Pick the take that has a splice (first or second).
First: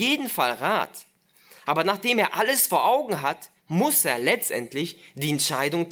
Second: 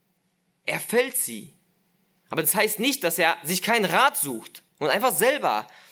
first